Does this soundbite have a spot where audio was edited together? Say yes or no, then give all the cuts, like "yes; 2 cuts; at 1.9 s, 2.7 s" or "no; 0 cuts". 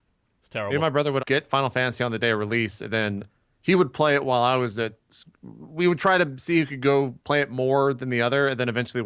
yes; 2 cuts; at 1.2 s, 7.2 s